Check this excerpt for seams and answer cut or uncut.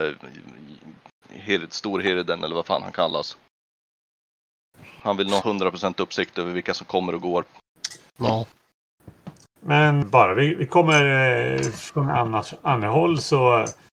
cut